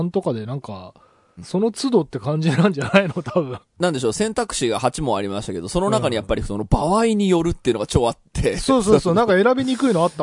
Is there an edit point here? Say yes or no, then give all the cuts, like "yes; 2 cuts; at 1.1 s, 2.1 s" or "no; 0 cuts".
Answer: no; 0 cuts